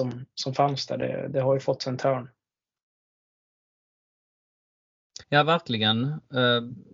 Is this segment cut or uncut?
cut